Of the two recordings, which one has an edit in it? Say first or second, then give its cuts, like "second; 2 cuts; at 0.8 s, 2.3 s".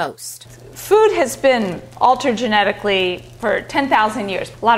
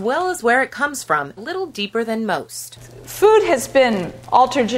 second; 1 cut; at 1.4 s